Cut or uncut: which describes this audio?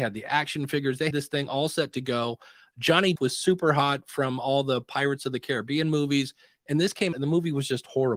cut